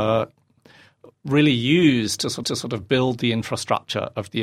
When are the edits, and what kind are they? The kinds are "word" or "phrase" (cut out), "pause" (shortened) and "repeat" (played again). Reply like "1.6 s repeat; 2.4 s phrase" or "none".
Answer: 2.4 s repeat